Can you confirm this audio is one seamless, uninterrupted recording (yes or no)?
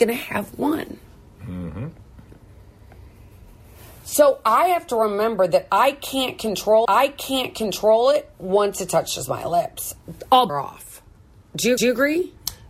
no